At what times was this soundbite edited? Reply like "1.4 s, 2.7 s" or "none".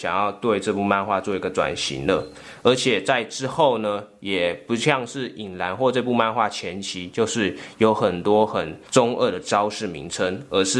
8.9 s